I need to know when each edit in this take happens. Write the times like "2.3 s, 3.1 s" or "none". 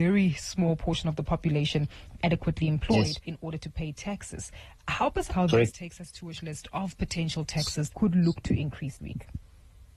2.2 s, 3.2 s, 5.3 s, 5.7 s, 6.4 s, 7.9 s, 9.0 s